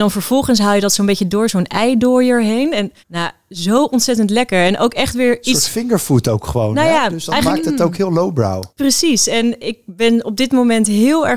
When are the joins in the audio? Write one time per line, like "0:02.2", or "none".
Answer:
0:03.0
0:08.7